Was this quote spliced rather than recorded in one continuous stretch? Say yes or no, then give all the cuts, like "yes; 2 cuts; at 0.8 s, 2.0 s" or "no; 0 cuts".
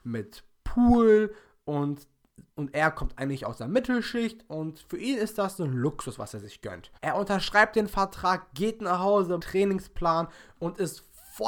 yes; 3 cuts; at 2.5 s, 7.0 s, 9.4 s